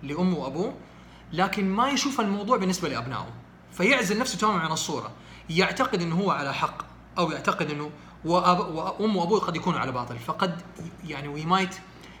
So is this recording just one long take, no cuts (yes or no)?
yes